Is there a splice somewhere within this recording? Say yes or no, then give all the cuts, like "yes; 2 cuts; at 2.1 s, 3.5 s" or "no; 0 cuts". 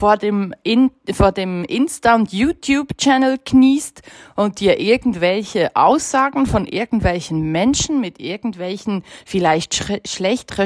no; 0 cuts